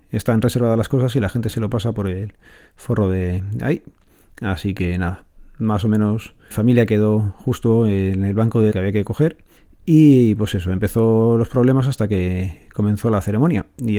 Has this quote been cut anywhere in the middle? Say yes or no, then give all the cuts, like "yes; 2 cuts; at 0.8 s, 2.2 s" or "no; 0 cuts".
yes; 2 cuts; at 6.5 s, 8.7 s